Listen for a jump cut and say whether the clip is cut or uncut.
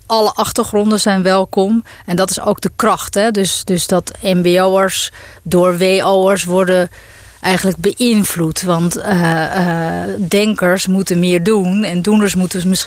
uncut